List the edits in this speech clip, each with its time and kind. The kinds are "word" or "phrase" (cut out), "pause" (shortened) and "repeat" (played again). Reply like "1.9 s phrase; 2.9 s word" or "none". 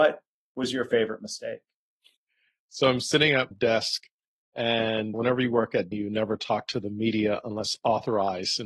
3.5 s word; 5.1 s word; 5.9 s word